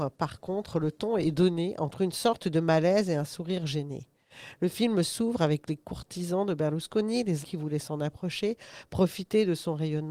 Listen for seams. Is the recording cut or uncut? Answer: cut